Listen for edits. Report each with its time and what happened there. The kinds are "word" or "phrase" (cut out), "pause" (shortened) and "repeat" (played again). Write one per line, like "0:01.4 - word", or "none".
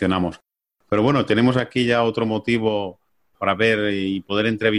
none